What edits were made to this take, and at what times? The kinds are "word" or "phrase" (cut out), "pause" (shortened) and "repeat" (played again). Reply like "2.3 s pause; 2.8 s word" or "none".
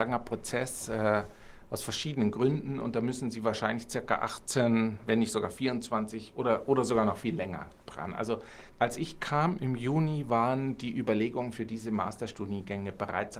8.7 s pause